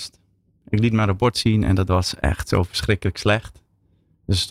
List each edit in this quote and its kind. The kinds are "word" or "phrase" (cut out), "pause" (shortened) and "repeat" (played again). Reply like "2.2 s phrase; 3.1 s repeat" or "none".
none